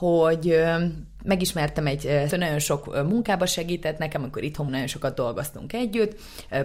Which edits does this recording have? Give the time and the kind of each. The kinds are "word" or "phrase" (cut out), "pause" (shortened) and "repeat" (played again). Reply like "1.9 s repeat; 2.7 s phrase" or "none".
2.3 s word; 4.7 s word